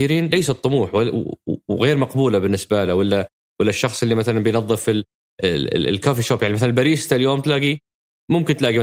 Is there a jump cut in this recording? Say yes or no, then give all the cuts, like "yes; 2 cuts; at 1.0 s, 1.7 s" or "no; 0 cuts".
no; 0 cuts